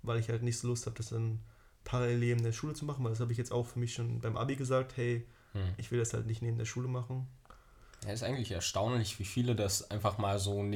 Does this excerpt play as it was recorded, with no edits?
yes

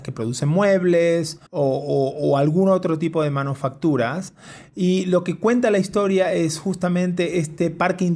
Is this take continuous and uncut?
no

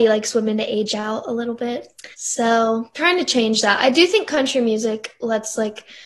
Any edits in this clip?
yes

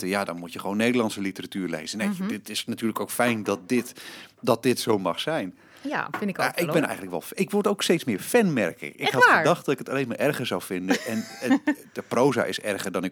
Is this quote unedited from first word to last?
yes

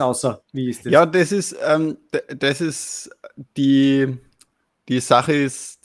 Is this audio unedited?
yes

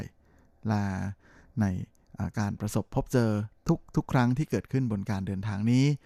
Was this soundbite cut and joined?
no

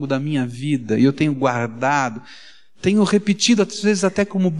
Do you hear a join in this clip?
no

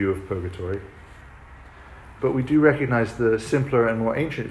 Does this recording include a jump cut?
yes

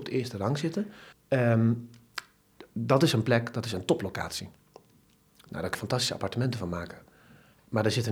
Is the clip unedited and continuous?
no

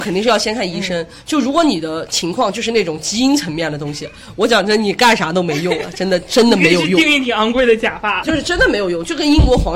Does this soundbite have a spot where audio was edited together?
yes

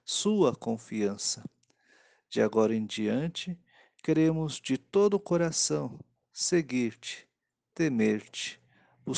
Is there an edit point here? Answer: no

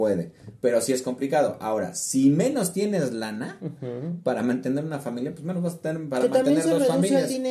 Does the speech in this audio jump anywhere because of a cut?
no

